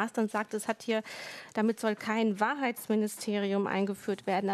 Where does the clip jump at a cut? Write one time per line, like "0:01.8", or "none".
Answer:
none